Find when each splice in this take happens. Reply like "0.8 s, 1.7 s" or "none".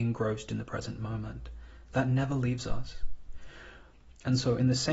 none